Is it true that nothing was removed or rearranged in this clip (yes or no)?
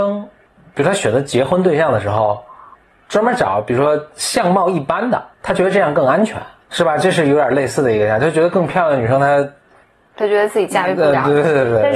no